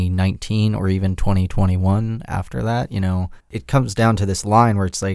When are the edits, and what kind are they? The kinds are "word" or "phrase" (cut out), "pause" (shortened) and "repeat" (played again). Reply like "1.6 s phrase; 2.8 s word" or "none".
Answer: 3.4 s pause